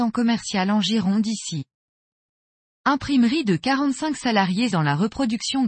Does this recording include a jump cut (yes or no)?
yes